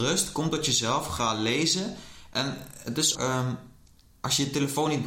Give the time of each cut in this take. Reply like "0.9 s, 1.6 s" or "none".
3.1 s